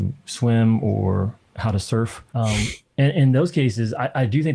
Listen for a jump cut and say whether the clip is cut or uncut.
cut